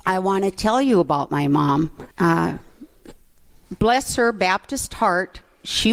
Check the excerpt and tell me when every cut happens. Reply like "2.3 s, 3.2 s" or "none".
2.1 s